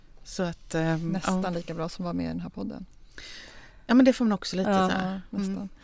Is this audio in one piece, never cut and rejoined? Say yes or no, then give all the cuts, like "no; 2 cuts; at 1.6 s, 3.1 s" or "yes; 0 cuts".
yes; 0 cuts